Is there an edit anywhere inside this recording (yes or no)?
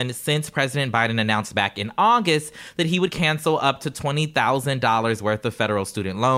no